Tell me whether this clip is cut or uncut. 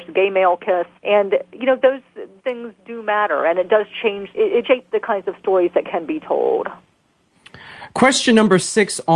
cut